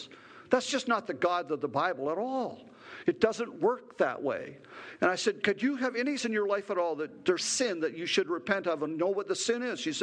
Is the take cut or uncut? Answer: cut